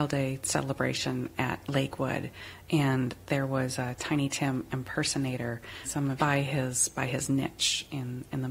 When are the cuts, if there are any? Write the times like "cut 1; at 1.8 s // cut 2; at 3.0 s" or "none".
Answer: cut 1; at 5.9 s // cut 2; at 6.2 s